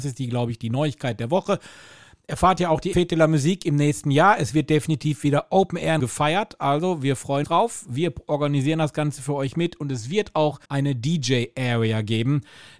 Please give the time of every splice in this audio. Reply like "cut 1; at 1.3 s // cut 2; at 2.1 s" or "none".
cut 1; at 2.9 s // cut 2; at 6.0 s // cut 3; at 7.4 s // cut 4; at 10.6 s